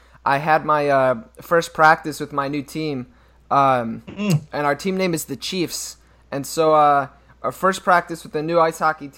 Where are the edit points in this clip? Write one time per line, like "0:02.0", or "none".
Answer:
none